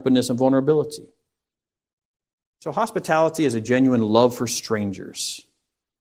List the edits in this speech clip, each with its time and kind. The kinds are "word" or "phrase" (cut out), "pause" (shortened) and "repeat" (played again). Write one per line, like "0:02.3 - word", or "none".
none